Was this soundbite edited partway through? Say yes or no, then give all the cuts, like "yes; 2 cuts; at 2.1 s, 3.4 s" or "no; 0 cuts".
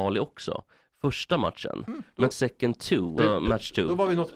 yes; 2 cuts; at 2.3 s, 3.2 s